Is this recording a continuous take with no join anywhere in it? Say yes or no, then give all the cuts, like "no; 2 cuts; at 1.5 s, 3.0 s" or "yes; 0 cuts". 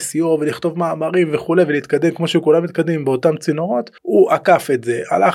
no; 1 cut; at 4.0 s